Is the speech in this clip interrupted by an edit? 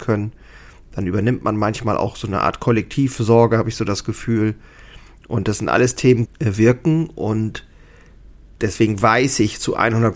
yes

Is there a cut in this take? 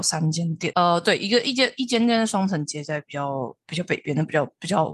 no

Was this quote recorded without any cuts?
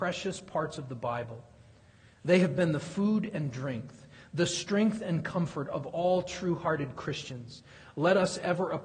yes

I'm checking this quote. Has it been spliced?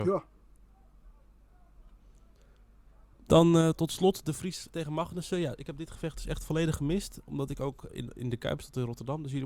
yes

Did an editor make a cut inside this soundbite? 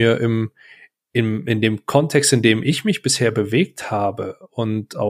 no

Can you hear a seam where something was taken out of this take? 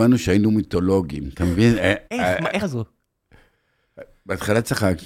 yes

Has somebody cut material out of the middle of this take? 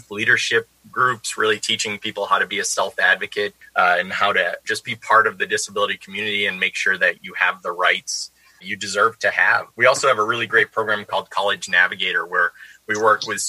yes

